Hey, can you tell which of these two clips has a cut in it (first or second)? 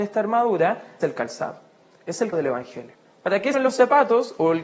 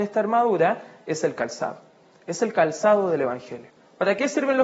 first